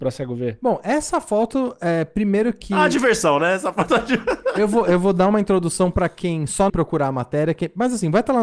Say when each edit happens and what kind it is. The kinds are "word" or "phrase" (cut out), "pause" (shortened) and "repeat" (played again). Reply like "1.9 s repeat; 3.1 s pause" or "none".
6.7 s phrase